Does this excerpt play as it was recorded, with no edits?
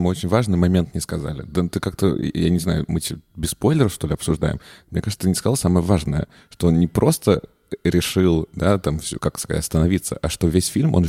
yes; 0 cuts

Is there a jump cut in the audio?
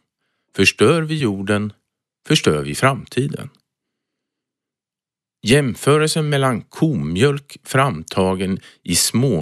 no; 0 cuts

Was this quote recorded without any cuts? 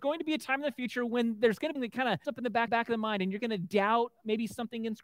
no; 3 cuts; at 1.8 s, 2.2 s, 2.7 s

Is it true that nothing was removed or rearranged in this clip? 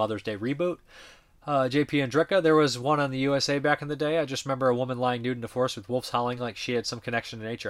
yes; 0 cuts

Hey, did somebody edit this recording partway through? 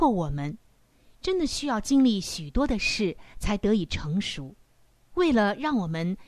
yes; 1 cut; at 4.7 s

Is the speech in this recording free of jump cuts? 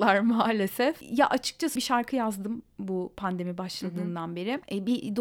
no; 1 cut; at 1.8 s

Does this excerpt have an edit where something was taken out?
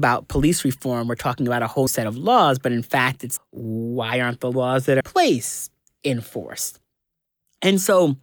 yes; 3 cuts; at 1.9 s, 3.4 s, 5.0 s

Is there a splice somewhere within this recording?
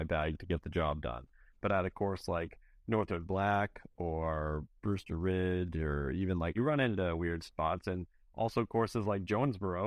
yes; 1 cut; at 6.5 s

